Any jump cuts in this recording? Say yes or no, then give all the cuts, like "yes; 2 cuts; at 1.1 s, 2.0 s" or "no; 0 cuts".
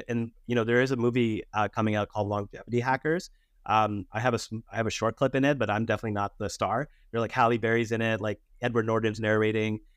no; 0 cuts